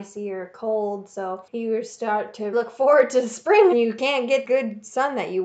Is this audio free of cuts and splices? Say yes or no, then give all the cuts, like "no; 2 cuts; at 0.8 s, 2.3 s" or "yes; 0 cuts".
no; 3 cuts; at 2.5 s, 3.7 s, 4.4 s